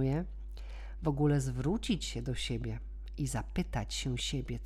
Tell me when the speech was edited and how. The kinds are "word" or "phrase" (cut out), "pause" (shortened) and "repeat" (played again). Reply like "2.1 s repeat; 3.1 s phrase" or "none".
none